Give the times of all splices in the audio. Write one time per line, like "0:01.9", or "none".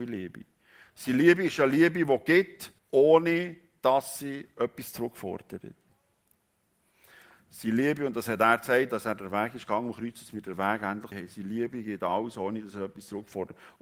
0:02.8
0:11.1